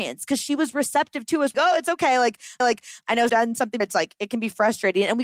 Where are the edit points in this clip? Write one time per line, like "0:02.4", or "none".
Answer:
0:01.5
0:02.6
0:03.3
0:03.8